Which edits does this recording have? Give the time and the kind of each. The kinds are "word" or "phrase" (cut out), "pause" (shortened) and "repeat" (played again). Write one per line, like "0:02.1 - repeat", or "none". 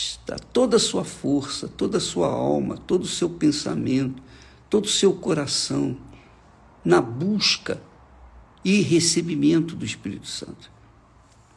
none